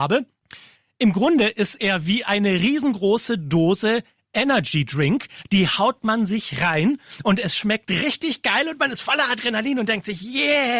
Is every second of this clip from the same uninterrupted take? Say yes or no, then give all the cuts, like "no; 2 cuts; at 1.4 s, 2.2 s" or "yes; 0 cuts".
yes; 0 cuts